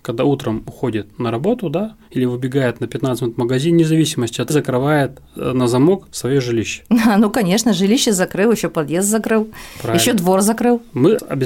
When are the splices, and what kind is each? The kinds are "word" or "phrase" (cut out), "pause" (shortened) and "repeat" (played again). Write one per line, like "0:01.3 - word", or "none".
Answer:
0:04.5 - phrase